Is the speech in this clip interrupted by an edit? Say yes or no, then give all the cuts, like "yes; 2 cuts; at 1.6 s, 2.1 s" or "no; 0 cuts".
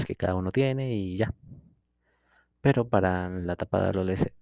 no; 0 cuts